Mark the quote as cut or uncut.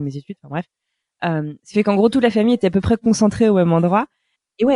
uncut